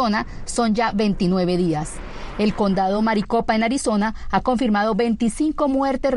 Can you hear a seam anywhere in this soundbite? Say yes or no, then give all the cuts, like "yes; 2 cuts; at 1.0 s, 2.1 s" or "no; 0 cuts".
no; 0 cuts